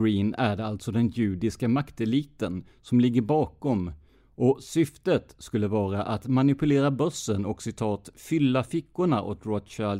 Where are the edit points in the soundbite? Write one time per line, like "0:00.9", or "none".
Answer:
none